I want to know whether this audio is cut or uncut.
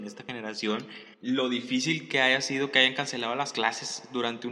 cut